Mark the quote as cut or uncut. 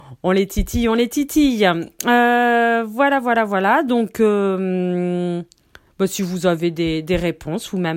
uncut